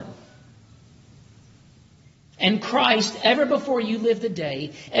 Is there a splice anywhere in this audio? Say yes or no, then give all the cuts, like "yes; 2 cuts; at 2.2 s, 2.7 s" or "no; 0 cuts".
no; 0 cuts